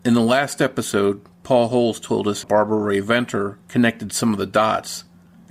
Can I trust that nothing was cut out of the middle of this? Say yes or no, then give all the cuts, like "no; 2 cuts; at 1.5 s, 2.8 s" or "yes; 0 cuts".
no; 2 cuts; at 2.4 s, 3.6 s